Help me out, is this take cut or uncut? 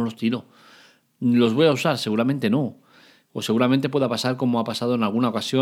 uncut